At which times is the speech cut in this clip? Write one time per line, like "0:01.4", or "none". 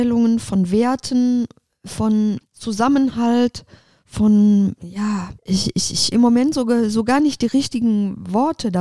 0:02.4
0:05.4
0:06.1